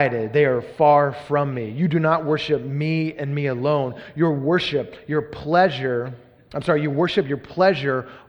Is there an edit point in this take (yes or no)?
no